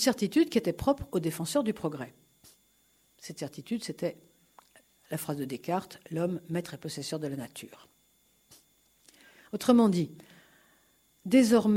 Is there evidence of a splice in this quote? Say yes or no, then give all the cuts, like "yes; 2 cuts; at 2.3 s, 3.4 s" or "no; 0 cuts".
no; 0 cuts